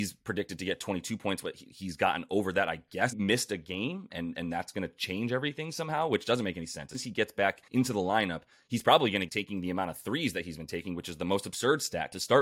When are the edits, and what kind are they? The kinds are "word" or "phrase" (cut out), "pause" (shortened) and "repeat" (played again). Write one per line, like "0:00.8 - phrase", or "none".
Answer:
0:03.1 - phrase
0:06.9 - word
0:07.7 - pause
0:09.3 - phrase